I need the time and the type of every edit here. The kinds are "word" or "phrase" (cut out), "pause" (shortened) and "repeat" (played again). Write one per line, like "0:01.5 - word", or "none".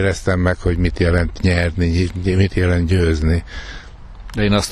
none